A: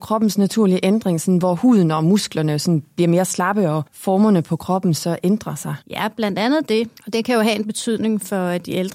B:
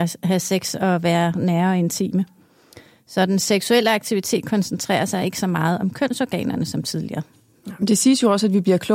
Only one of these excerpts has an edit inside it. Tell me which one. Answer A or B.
A